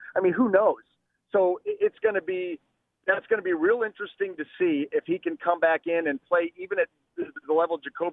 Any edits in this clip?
no; 0 cuts

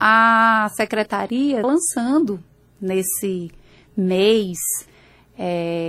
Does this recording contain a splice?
yes; 1 cut; at 1.6 s

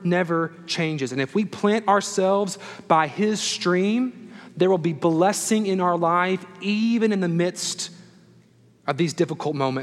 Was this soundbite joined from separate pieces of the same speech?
no; 0 cuts

